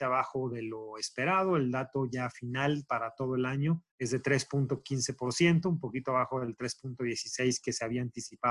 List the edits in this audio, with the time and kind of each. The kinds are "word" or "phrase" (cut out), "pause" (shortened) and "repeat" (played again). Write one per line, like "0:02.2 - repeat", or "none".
0:03.9 - pause